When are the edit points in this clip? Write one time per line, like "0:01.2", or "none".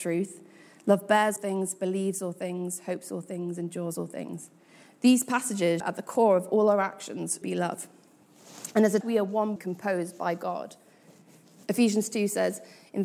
0:01.4
0:05.8
0:07.4
0:09.0
0:09.6

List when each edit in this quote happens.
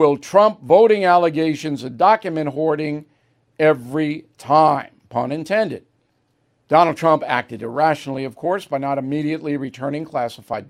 none

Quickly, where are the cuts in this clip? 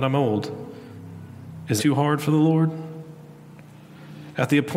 0:01.8

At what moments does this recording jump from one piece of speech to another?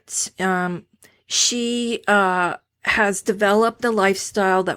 none

